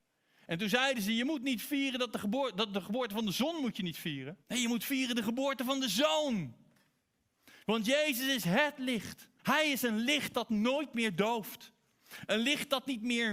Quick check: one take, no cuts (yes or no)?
no